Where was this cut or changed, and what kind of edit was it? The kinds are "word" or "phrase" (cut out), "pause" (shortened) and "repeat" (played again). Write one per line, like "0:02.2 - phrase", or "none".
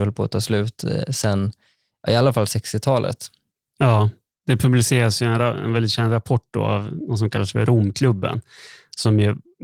none